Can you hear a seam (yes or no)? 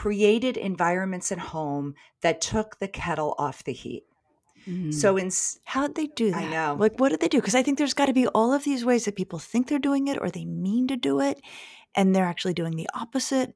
no